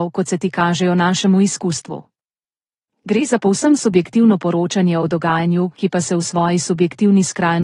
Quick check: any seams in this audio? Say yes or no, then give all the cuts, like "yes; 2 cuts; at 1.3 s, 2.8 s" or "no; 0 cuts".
no; 0 cuts